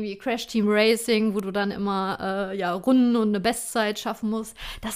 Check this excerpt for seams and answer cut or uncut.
uncut